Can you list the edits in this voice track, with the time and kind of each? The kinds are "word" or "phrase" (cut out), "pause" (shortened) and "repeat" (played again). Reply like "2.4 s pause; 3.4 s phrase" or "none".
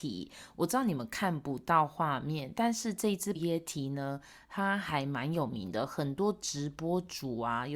3.3 s word